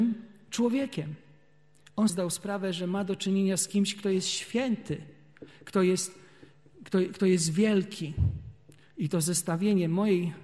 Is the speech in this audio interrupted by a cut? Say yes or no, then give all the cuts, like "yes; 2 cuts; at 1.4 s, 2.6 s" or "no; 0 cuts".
yes; 1 cut; at 2.1 s